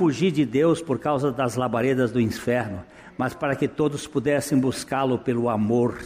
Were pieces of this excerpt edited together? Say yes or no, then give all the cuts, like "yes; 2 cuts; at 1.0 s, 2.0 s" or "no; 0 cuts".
no; 0 cuts